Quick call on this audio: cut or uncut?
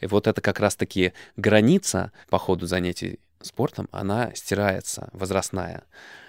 cut